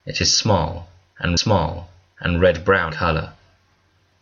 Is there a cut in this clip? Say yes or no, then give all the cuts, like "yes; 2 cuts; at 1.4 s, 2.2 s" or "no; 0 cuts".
yes; 2 cuts; at 1.4 s, 2.9 s